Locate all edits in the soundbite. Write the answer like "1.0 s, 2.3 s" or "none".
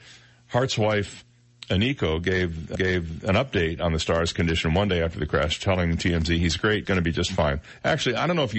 2.8 s, 6.9 s

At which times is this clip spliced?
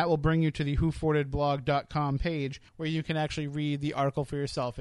2.7 s

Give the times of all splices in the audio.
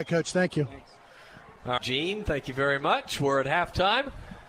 1.8 s, 2.2 s

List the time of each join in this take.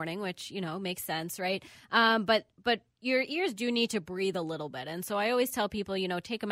none

